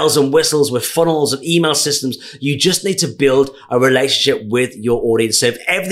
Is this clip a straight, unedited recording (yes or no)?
yes